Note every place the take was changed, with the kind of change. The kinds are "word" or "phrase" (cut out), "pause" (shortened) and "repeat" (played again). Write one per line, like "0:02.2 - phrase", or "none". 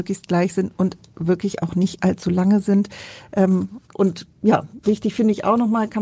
0:03.8 - pause